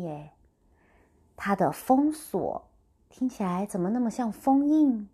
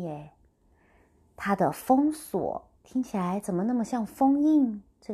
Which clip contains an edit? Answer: second; 1 cut; at 2.8 s

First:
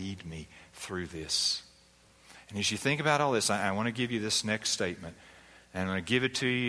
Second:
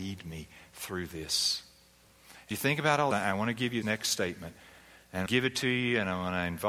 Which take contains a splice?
second; 4 cuts; at 2.5 s, 3.1 s, 3.8 s, 5.3 s

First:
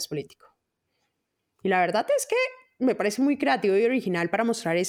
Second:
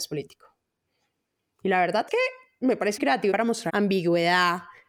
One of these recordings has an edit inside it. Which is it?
second; 4 cuts; at 2.1 s, 3.0 s, 3.3 s, 3.7 s

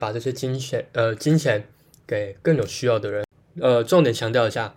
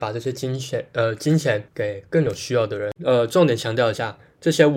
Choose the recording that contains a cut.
second; 2 cuts; at 1.7 s, 3.0 s

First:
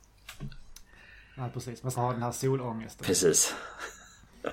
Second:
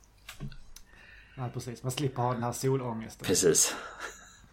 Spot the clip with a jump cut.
first; 1 cut; at 1.9 s

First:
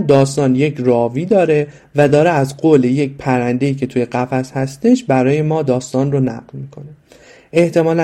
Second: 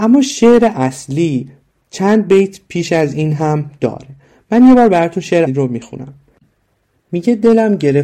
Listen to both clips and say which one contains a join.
second; 1 cut; at 5.5 s

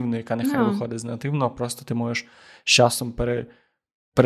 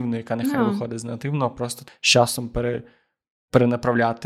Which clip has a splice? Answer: second; 1 cut; at 1.9 s

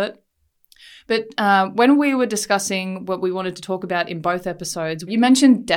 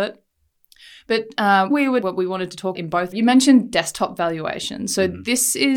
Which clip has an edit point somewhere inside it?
second; 4 cuts; at 1.7 s, 2.0 s, 2.7 s, 3.1 s

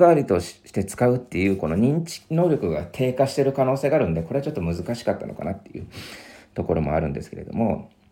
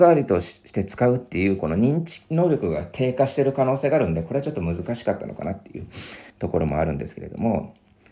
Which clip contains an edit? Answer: second; 1 cut; at 6.3 s

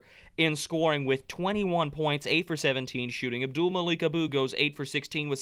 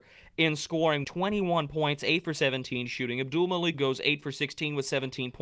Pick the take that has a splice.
second; 2 cuts; at 1.0 s, 3.7 s

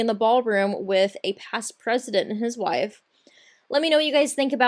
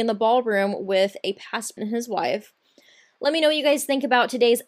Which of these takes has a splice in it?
second; 1 cut; at 1.8 s

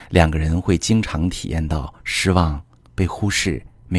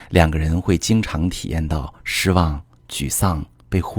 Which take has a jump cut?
first; 1 cut; at 2.8 s

